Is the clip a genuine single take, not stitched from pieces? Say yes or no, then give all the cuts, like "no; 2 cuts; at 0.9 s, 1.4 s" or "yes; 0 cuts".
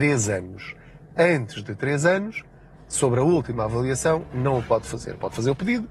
yes; 0 cuts